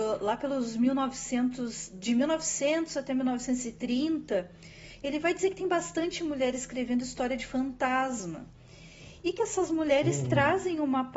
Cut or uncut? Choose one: uncut